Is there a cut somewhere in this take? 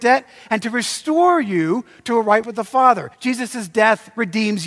yes; 2 cuts; at 2.4 s, 3.1 s

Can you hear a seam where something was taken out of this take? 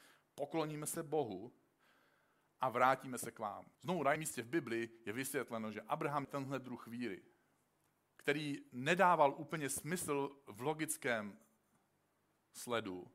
yes; 4 cuts; at 3.7 s, 4.2 s, 6.2 s, 7.9 s

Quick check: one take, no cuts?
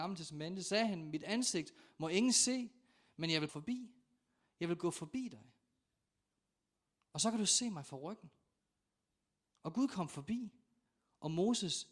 no; 1 cut; at 3.5 s

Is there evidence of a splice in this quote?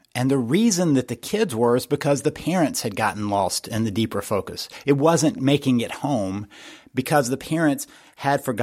no; 0 cuts

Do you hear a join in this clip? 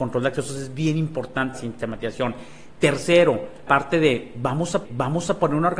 yes; 3 cuts; at 1.5 s, 3.7 s, 4.8 s

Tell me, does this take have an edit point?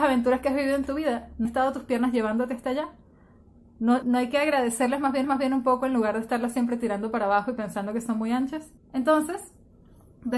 yes; 4 cuts; at 1.4 s, 4.0 s, 5.2 s, 8.8 s

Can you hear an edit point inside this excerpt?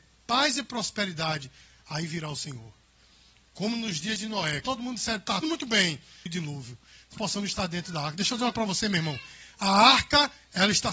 yes; 5 cuts; at 4.6 s, 5.4 s, 6.3 s, 7.1 s, 8.5 s

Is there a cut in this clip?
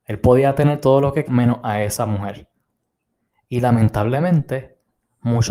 yes; 1 cut; at 1.3 s

